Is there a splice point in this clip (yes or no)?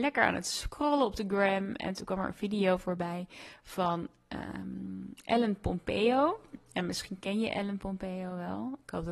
no